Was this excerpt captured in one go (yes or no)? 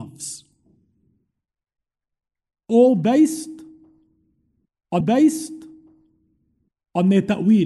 no